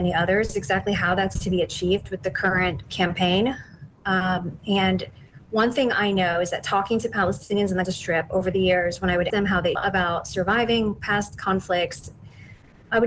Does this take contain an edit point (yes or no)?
yes